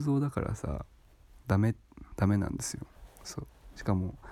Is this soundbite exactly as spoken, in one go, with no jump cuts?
yes; 0 cuts

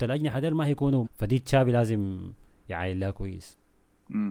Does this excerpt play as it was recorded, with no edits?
no; 1 cut; at 1.0 s

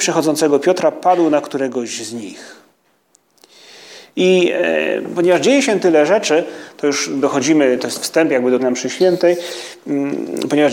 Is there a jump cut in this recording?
yes; 1 cut; at 8.6 s

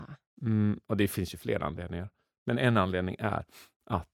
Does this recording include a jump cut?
no; 0 cuts

